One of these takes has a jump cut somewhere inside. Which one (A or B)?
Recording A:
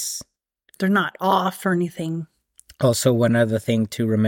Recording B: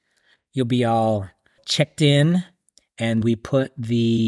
B